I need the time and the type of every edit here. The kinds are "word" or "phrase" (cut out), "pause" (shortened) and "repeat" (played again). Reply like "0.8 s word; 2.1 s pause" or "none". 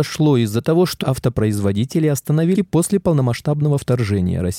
1.0 s word; 2.5 s phrase